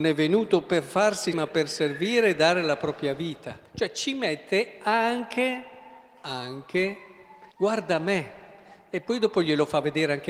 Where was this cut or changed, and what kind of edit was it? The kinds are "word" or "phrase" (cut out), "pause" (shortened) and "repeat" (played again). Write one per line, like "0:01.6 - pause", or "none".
0:01.3 - word
0:03.7 - pause
0:07.5 - pause